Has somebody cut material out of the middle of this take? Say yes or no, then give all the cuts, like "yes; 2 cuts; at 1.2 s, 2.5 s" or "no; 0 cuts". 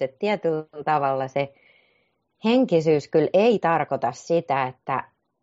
no; 0 cuts